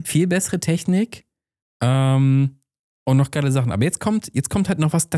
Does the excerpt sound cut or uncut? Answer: uncut